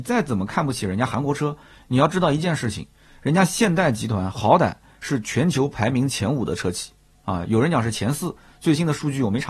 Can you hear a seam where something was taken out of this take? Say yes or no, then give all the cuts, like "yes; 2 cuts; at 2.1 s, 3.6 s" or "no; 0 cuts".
no; 0 cuts